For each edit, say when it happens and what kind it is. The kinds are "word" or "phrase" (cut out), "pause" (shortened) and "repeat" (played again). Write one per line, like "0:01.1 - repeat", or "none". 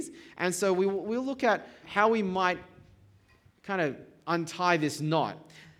0:01.8 - word